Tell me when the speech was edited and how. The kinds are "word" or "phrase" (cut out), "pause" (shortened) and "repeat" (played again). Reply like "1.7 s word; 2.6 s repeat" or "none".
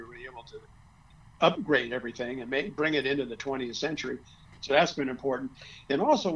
1.4 s word

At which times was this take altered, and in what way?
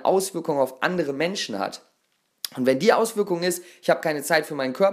none

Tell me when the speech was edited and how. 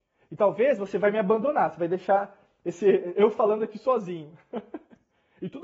none

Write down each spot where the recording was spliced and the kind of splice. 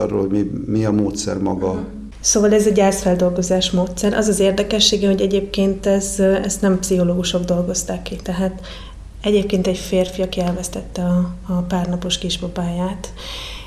none

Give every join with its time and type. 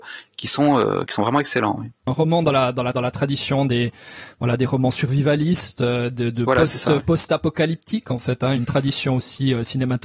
2.9 s repeat; 8.6 s word

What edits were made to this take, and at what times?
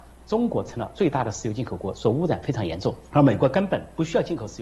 3.1 s pause

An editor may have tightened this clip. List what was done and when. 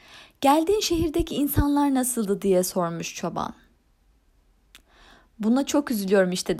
none

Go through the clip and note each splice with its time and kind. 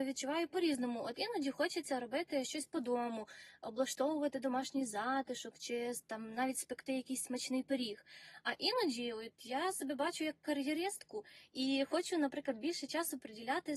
none

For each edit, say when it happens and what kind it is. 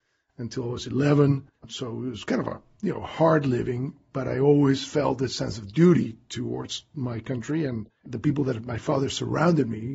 1.6 s pause; 7.9 s pause

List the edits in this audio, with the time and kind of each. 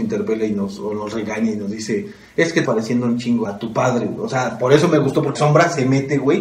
2.6 s word; 3.4 s word; 5.3 s word

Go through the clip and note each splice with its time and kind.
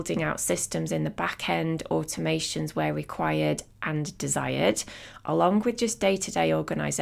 none

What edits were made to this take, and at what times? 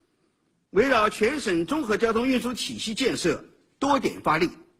none

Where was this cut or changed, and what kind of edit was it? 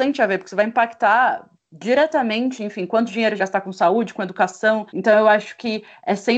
3.4 s phrase; 4.9 s pause

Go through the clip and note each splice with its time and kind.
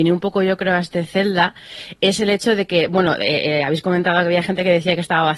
none

